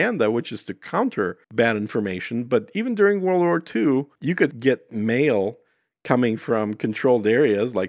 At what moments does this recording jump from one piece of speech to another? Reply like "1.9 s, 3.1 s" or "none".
1.4 s, 4.2 s, 4.5 s